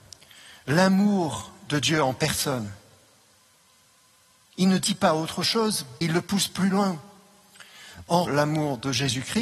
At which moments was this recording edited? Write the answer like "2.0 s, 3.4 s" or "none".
6.0 s, 8.2 s